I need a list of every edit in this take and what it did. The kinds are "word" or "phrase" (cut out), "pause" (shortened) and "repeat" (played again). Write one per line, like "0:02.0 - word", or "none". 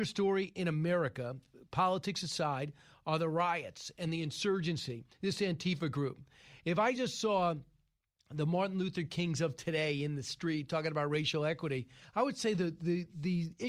none